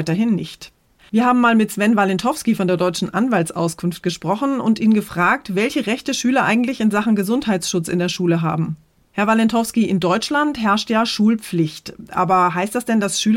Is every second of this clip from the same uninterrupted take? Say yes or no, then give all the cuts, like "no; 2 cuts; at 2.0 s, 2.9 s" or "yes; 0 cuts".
yes; 0 cuts